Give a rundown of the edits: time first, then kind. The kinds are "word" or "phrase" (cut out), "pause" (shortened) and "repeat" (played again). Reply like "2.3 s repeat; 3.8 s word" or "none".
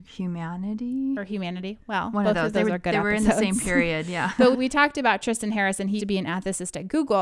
4.5 s word; 6.0 s word